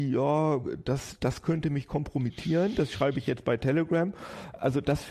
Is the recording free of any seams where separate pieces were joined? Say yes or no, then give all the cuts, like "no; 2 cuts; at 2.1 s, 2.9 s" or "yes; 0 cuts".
yes; 0 cuts